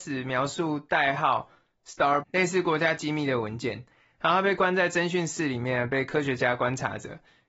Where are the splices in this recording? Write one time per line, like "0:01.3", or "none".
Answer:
0:02.2